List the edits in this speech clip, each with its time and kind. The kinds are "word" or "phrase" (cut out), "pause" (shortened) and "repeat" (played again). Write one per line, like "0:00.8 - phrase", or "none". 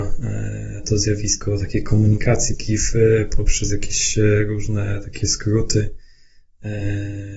0:02.5 - phrase